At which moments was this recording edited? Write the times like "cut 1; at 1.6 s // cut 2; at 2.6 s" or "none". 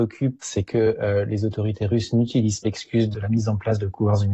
none